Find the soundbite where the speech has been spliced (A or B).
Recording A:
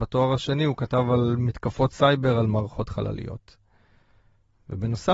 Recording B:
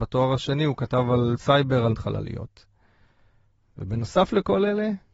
B